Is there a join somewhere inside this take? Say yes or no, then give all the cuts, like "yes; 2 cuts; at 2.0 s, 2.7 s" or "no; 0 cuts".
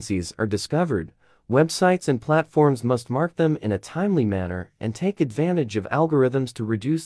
no; 0 cuts